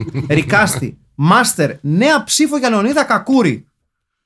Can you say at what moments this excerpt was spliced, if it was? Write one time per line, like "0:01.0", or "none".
none